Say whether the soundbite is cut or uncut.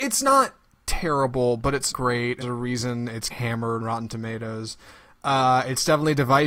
cut